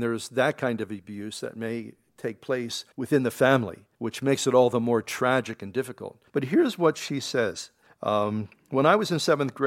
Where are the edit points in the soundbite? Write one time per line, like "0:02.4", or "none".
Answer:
0:02.9
0:03.9
0:06.3
0:07.9